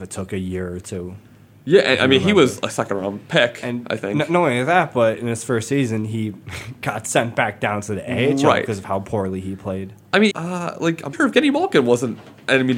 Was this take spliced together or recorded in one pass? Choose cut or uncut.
cut